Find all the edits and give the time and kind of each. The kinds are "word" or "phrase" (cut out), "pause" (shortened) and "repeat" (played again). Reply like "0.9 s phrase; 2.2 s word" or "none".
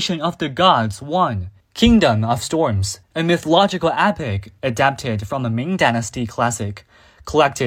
1.6 s pause; 3.0 s pause